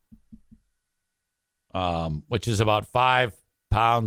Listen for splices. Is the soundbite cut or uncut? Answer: uncut